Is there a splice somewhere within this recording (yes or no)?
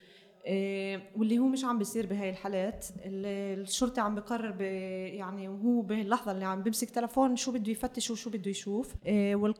no